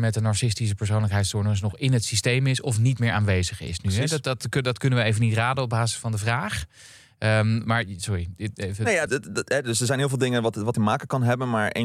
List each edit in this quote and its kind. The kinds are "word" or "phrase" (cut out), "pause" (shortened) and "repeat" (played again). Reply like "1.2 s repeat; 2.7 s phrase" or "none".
9.1 s word; 10.7 s phrase